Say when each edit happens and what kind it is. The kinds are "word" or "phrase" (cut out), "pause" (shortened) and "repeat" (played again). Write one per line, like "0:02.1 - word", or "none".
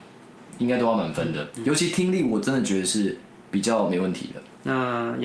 0:03.5 - pause

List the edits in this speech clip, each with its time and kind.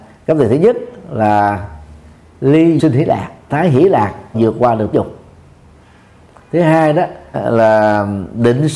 0:02.8 - word
0:03.5 - word
0:04.3 - word
0:04.9 - word
0:07.3 - word

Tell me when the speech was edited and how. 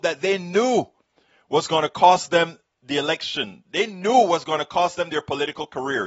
none

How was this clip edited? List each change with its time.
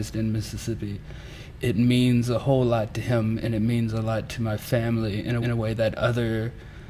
0:05.4 - repeat

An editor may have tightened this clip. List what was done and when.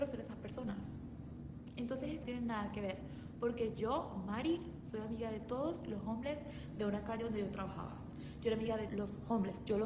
0:02.2 - phrase
0:08.9 - word

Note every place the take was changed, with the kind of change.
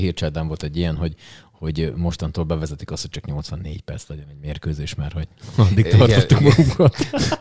none

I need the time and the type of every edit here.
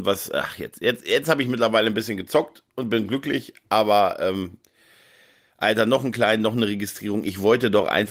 none

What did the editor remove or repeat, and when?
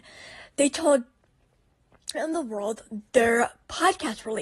0:02.1 - word

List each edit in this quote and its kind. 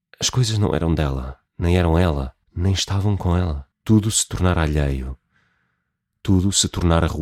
0:01.5 - pause
0:02.4 - pause
0:03.7 - pause

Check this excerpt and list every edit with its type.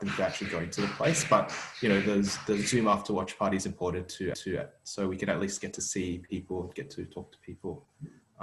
0:04.3 - repeat

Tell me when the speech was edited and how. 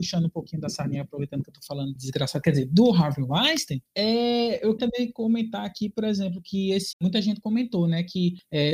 0:02.0 - word
0:04.8 - word
0:06.9 - word

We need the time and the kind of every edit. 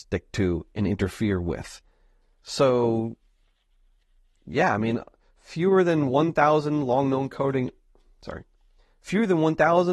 none

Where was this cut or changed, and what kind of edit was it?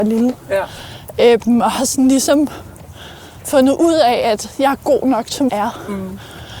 0:05.5 - word

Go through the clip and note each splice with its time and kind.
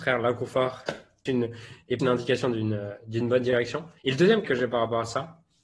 0:01.3 - word
0:02.0 - word
0:04.0 - pause
0:04.4 - word

